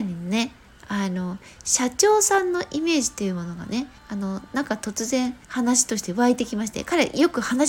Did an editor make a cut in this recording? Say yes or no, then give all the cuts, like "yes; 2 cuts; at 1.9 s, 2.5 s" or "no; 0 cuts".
yes; 2 cuts; at 4.0 s, 5.4 s